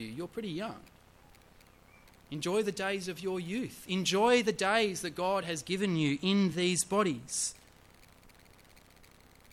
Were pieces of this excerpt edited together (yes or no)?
no